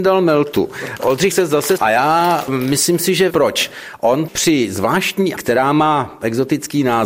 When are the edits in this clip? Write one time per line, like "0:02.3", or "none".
0:01.3
0:01.8
0:03.3
0:04.3
0:05.4